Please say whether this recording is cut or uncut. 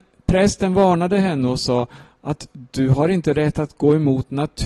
uncut